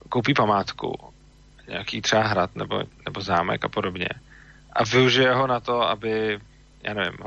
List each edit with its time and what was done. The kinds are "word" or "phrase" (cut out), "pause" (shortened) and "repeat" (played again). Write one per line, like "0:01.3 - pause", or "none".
none